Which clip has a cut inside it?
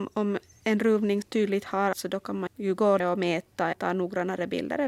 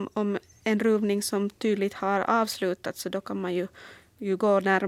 first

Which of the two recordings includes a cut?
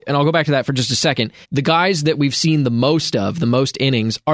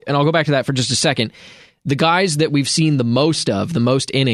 first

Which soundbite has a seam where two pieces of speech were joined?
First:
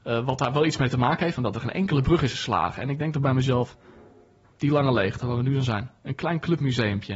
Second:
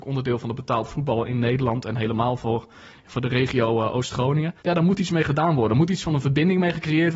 second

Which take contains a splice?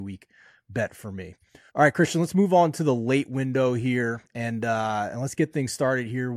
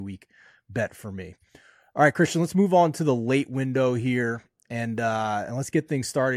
first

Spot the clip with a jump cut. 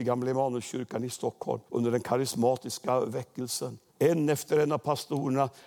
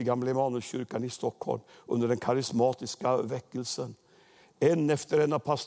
first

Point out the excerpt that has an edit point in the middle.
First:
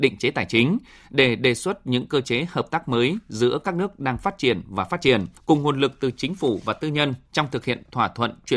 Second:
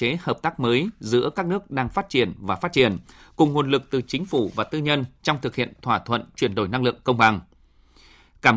first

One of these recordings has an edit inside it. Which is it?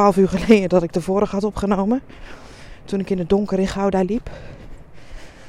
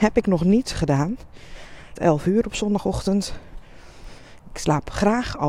second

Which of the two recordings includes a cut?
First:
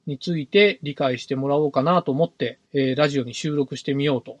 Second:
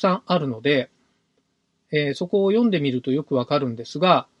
first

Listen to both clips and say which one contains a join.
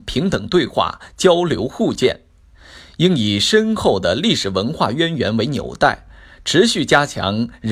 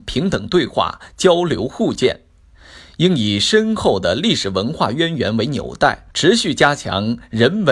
second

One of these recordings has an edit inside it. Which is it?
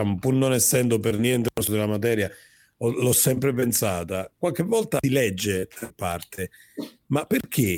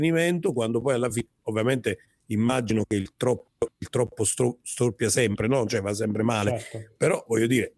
first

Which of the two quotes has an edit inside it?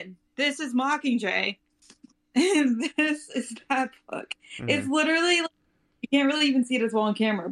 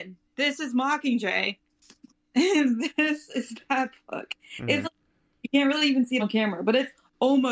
second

